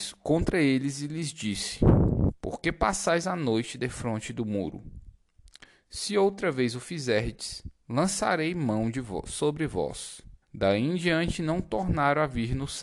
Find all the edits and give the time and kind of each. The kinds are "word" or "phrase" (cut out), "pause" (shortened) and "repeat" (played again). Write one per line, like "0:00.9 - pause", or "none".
0:10.4 - pause